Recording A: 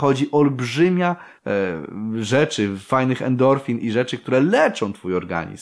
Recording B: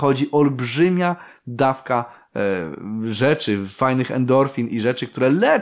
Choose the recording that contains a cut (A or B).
A